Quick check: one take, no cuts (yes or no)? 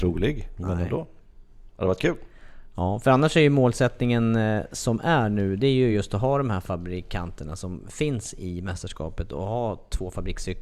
yes